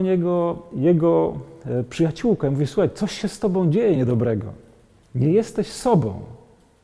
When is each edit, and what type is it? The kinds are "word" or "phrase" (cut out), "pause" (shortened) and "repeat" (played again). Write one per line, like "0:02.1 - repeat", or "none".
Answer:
none